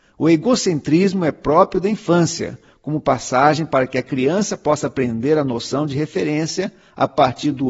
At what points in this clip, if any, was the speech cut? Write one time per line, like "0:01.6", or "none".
none